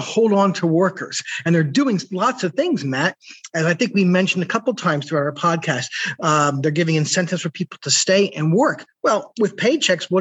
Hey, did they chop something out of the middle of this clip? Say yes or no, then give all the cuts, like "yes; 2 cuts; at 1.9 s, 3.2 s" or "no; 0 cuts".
no; 0 cuts